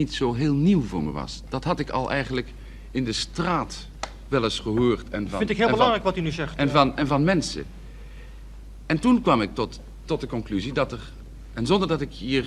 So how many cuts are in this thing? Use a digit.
0